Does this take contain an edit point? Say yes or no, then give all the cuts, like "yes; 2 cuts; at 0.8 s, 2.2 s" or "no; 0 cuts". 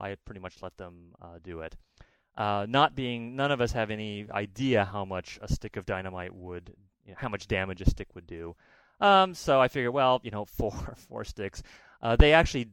no; 0 cuts